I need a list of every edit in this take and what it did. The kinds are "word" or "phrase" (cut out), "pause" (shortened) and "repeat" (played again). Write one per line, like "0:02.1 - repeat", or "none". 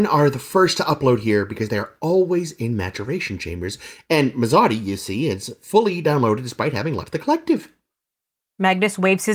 none